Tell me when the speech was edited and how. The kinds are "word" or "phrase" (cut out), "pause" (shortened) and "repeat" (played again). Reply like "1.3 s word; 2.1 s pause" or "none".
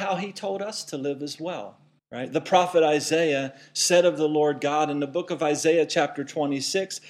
2.0 s pause